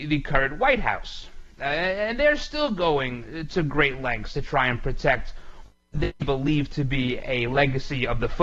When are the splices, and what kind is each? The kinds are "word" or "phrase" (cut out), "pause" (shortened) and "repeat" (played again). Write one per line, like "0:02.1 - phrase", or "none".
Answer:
none